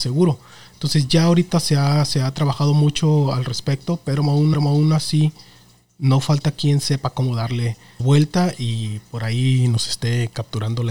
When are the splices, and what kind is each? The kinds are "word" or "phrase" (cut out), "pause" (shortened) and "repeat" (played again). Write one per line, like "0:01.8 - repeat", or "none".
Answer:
0:04.5 - repeat
0:08.0 - word

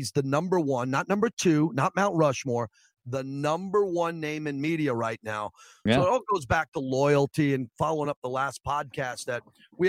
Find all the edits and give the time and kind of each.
none

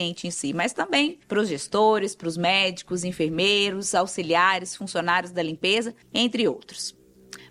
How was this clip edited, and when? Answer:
0:01.2 - pause
0:06.0 - pause

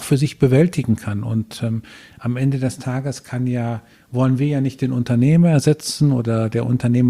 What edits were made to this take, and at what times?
none

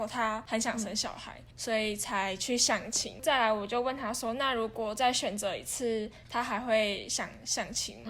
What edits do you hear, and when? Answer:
0:01.5 - word

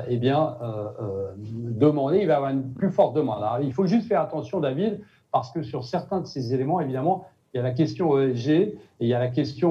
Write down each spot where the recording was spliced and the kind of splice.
none

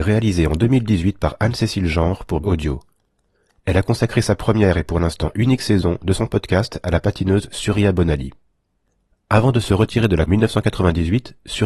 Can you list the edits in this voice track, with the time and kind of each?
0:02.4 - word
0:10.3 - word

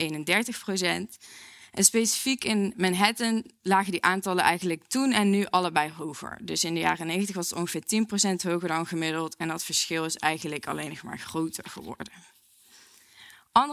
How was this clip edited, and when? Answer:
none

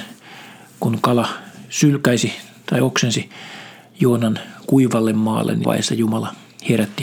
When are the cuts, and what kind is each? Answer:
0:05.6 - word

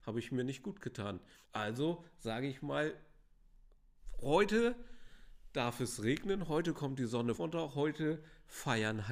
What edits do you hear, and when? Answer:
0:01.4 - pause
0:07.3 - word

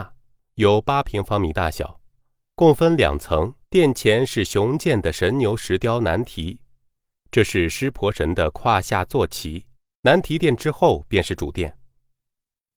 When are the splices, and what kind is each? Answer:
0:03.6 - pause
0:09.7 - pause

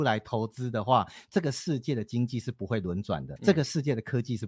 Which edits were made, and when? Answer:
0:03.4 - word

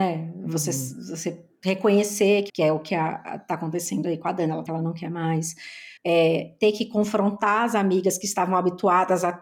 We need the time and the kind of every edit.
0:02.5 - phrase
0:04.7 - phrase
0:06.0 - pause

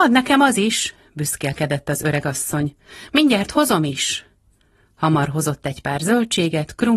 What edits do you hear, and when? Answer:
none

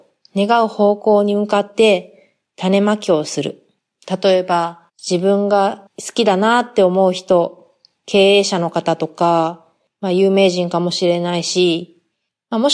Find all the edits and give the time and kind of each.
0:04.9 - pause

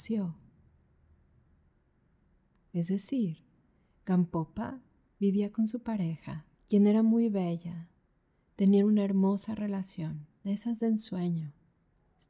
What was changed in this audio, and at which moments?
0:06.5 - pause

